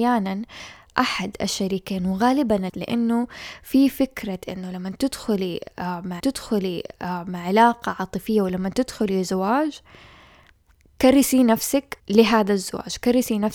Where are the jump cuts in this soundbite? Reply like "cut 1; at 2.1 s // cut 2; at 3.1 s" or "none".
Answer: cut 1; at 2.7 s // cut 2; at 6.2 s // cut 3; at 12.0 s